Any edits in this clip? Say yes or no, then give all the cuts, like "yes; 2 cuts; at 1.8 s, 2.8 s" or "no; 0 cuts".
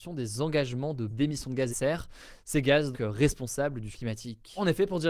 yes; 4 cuts; at 1.1 s, 1.7 s, 2.9 s, 3.9 s